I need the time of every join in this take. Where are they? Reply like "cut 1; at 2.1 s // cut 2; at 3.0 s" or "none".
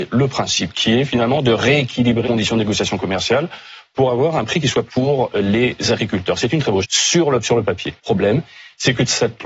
cut 1; at 2.2 s // cut 2; at 4.9 s // cut 3; at 6.8 s // cut 4; at 7.4 s // cut 5; at 8.0 s

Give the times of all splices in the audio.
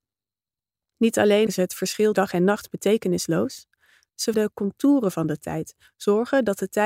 cut 1; at 1.5 s // cut 2; at 2.1 s // cut 3; at 4.3 s

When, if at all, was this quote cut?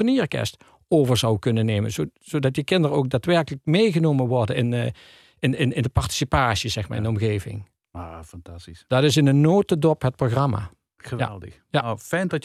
none

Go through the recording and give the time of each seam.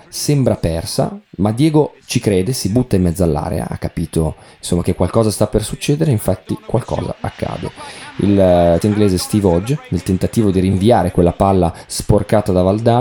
cut 1; at 8.8 s

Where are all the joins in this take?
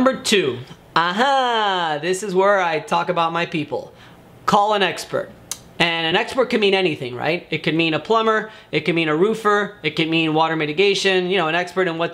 none

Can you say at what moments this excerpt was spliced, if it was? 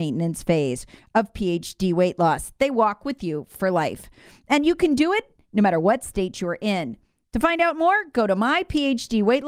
none

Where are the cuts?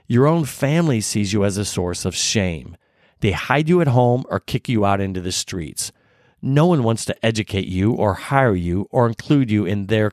none

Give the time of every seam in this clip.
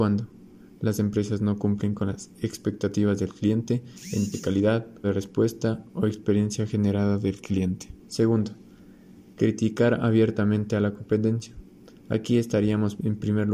cut 1; at 4.3 s // cut 2; at 5.0 s // cut 3; at 8.0 s

